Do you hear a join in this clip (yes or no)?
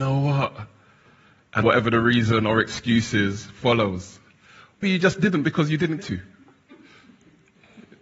yes